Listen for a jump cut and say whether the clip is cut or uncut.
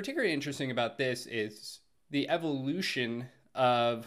uncut